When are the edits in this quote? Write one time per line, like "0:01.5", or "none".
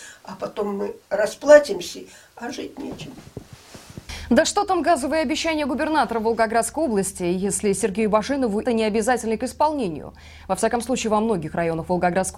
0:01.0
0:08.7